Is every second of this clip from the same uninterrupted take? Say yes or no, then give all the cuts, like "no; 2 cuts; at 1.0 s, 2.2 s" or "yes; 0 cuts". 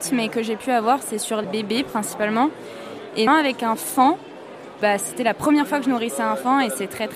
no; 2 cuts; at 1.4 s, 3.3 s